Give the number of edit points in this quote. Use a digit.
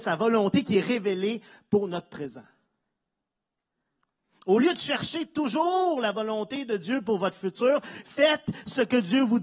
0